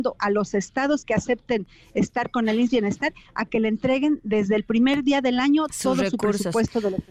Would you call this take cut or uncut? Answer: uncut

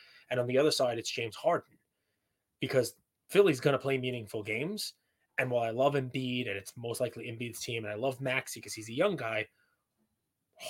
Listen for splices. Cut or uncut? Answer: uncut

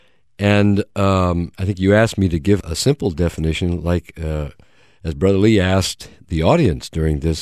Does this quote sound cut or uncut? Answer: cut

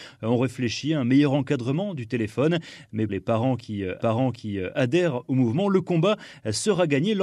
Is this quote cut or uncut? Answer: cut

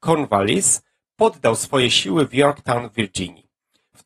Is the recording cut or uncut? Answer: uncut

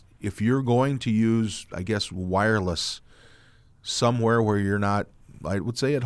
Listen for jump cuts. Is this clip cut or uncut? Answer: uncut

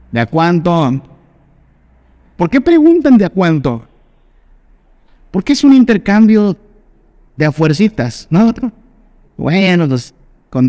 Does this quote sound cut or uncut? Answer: uncut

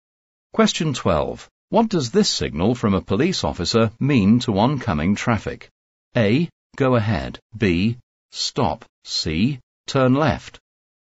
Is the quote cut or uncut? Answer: cut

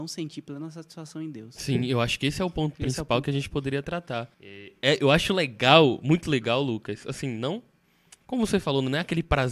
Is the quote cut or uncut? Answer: cut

